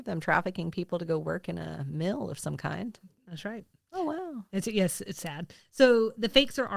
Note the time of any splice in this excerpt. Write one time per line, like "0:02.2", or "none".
none